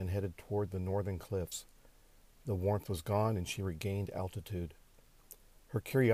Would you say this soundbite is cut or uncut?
uncut